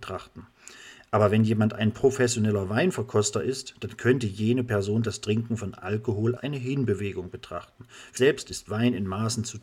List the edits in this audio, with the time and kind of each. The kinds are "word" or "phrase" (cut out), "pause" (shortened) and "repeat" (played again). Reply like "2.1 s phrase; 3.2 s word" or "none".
6.4 s word; 8.2 s word